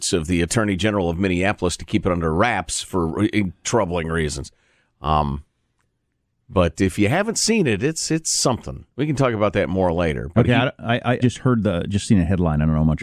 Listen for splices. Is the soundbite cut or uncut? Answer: cut